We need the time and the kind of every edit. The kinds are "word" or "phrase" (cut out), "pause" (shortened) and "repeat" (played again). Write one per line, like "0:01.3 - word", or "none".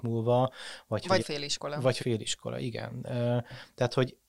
0:01.2 - word
0:02.0 - phrase